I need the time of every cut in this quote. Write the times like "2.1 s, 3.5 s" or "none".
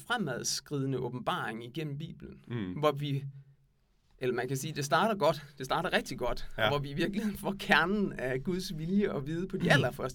none